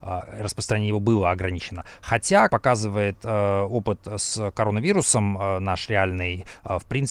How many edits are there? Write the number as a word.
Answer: one